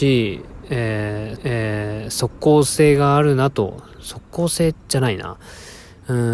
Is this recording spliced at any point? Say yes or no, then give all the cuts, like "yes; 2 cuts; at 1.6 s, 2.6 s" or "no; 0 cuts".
yes; 2 cuts; at 1.4 s, 4.8 s